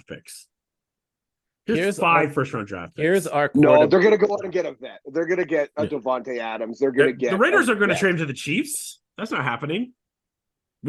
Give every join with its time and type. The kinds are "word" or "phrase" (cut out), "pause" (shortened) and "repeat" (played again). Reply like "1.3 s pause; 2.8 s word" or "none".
none

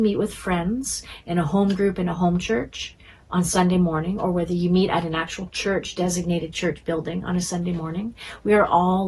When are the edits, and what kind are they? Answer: none

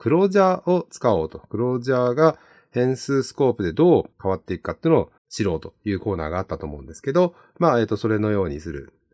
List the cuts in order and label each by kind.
4.1 s pause; 5.2 s pause

